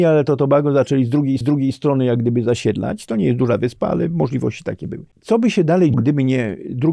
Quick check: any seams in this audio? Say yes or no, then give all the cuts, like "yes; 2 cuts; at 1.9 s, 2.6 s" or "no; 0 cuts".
yes; 3 cuts; at 1.4 s, 5.1 s, 5.9 s